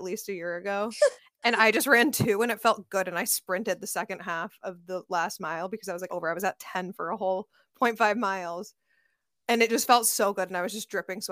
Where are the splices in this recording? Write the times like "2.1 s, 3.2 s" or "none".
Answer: 6.1 s

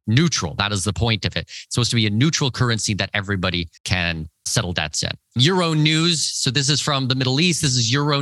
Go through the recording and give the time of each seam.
3.8 s

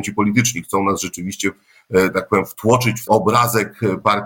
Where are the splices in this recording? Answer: 3.1 s

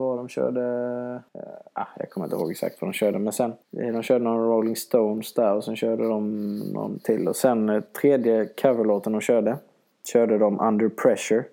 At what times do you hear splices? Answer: 1.3 s, 3.6 s

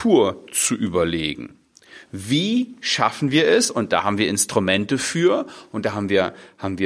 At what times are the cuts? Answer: none

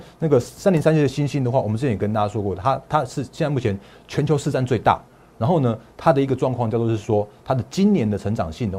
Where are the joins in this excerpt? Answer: none

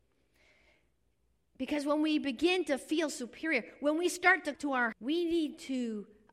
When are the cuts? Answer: 4.5 s, 4.9 s

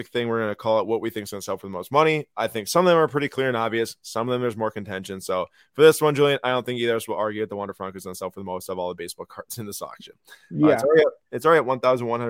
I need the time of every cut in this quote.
none

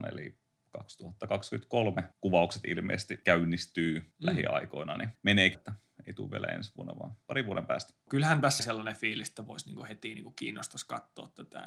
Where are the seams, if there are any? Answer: 2.1 s, 5.5 s, 7.3 s, 8.6 s

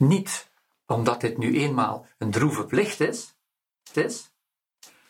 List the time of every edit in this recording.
3.9 s

